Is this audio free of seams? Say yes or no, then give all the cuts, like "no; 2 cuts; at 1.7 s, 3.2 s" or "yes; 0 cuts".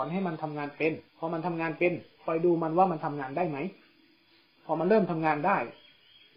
no; 1 cut; at 1.1 s